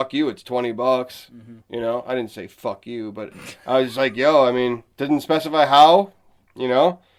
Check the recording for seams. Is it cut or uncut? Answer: cut